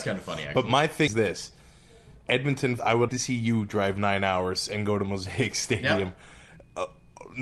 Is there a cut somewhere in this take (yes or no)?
yes